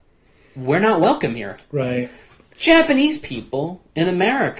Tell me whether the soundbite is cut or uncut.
uncut